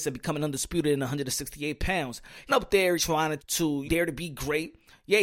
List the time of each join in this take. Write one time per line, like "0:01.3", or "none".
0:02.5
0:03.0
0:03.4
0:03.8